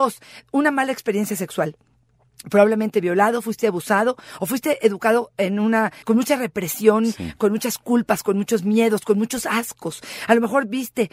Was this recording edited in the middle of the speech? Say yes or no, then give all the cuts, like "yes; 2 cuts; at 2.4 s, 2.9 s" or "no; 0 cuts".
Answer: yes; 2 cuts; at 2.9 s, 6.0 s